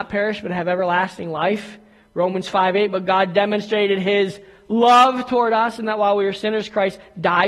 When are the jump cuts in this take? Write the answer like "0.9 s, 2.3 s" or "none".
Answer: none